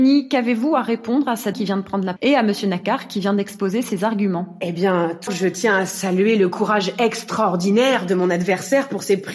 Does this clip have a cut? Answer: yes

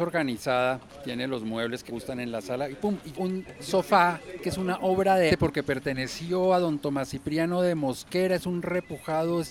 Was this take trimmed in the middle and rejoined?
yes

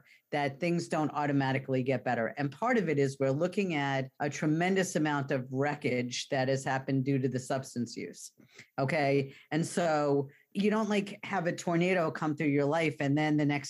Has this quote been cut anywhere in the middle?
yes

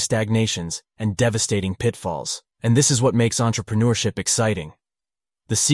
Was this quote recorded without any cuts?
no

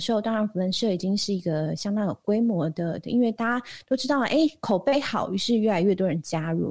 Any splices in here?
no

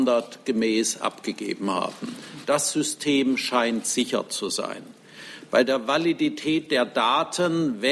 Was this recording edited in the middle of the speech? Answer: no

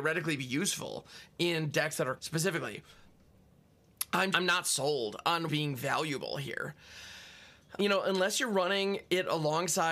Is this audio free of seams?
no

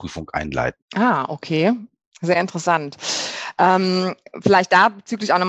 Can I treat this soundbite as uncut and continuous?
yes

